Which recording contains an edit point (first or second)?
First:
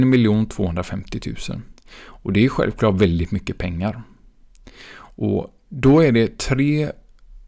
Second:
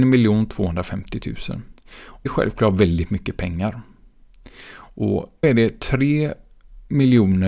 second